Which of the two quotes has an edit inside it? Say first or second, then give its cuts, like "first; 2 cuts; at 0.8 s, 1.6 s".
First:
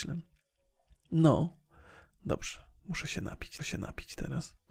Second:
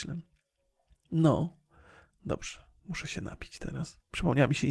first; 1 cut; at 3.6 s